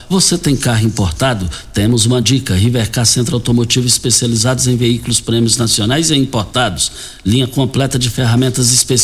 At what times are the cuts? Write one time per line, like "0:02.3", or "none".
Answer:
none